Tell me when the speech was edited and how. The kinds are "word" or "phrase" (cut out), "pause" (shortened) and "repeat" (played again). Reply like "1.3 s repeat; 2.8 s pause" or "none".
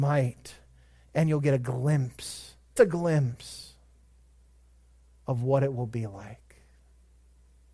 2.8 s word